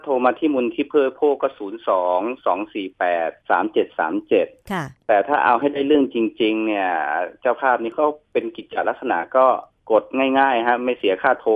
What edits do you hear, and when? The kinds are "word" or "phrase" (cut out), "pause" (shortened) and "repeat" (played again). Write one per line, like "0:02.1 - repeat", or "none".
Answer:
0:03.4 - pause